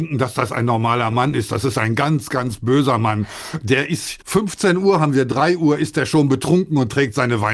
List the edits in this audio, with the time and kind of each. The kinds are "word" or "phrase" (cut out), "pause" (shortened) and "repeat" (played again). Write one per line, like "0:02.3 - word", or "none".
0:04.2 - pause